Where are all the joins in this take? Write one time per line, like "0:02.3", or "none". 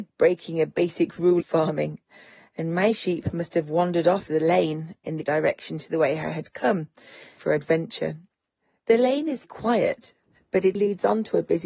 0:01.4
0:04.3
0:05.2
0:07.4
0:09.4
0:10.7